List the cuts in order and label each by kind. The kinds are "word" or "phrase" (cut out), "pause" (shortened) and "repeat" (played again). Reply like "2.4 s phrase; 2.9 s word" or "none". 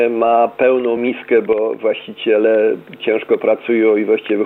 none